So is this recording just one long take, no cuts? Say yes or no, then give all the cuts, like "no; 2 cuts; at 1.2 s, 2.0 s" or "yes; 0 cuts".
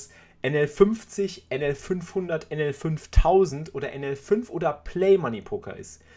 yes; 0 cuts